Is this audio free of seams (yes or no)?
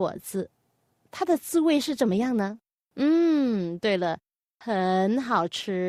yes